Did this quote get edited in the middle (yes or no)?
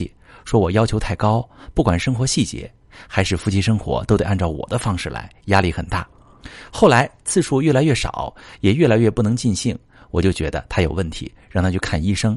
no